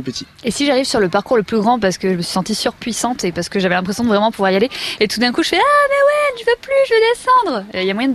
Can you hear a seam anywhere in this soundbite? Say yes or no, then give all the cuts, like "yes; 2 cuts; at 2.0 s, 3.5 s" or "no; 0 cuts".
no; 0 cuts